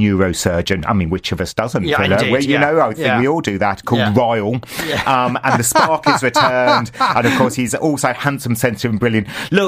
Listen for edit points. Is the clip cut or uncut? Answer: uncut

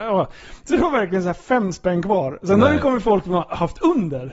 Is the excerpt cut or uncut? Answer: uncut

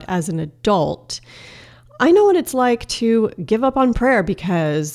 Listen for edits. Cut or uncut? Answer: uncut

